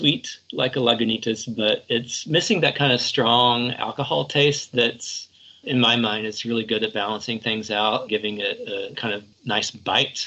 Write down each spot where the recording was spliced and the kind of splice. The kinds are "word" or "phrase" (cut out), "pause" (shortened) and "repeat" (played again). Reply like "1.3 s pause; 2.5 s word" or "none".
5.6 s word; 8.1 s word; 8.9 s word; 9.3 s pause